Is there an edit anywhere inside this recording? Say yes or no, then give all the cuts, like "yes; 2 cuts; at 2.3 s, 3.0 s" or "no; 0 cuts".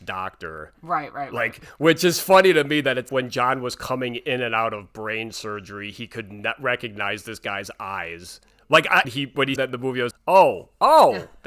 yes; 4 cuts; at 3.1 s, 9.0 s, 9.6 s, 10.1 s